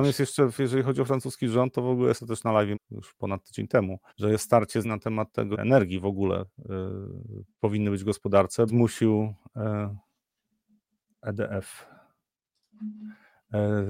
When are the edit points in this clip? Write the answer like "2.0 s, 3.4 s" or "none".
2.2 s, 2.7 s, 4.1 s, 4.8 s, 5.5 s, 8.7 s